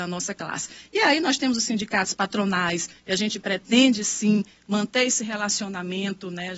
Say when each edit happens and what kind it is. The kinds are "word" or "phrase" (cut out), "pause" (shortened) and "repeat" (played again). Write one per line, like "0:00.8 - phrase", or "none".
none